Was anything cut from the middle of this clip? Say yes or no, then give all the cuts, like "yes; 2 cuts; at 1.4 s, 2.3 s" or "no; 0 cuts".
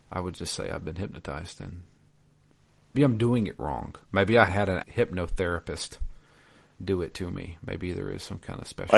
yes; 4 cuts; at 2.9 s, 4.0 s, 4.5 s, 4.8 s